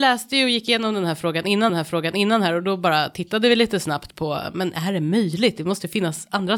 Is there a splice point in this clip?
yes; 1 cut; at 1.7 s

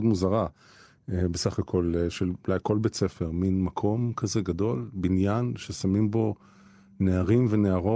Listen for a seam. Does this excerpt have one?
no; 0 cuts

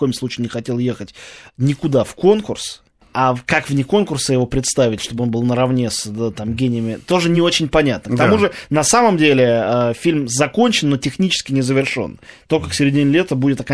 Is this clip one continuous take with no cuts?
yes; 0 cuts

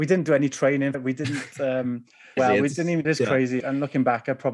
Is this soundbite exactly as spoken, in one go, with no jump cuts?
no; 4 cuts; at 0.9 s, 2.4 s, 3.0 s, 3.6 s

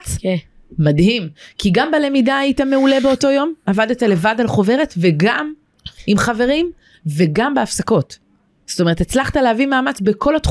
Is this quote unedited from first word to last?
yes; 0 cuts

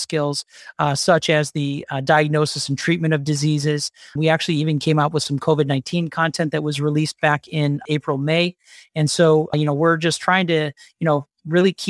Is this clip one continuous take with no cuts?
yes; 0 cuts

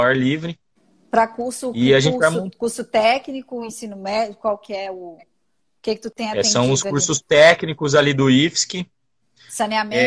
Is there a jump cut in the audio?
no; 0 cuts

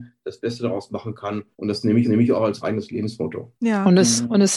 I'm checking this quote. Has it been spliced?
yes; 4 cuts; at 1.5 s, 2.0 s, 2.6 s, 3.6 s

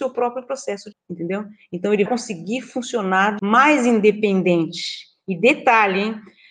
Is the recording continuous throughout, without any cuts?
no; 3 cuts; at 0.9 s, 2.1 s, 3.4 s

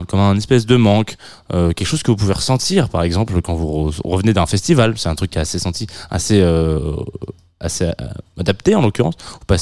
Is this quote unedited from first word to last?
yes; 0 cuts

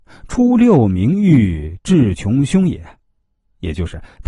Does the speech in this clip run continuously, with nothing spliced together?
yes; 0 cuts

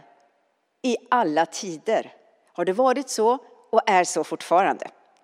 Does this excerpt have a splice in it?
no; 0 cuts

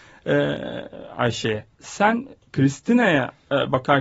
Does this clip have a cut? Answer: yes; 1 cut; at 1.7 s

